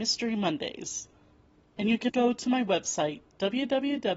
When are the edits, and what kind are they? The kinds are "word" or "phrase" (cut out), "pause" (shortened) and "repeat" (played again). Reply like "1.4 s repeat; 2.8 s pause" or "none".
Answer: 2.1 s word